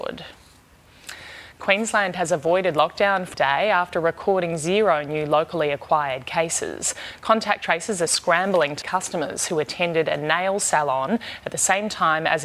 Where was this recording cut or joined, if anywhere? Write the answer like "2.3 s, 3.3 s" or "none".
3.3 s, 8.1 s, 8.8 s